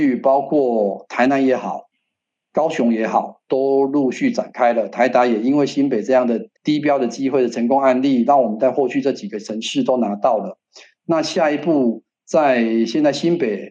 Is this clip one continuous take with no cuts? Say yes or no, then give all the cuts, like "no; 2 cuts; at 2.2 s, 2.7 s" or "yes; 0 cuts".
no; 1 cut; at 6.6 s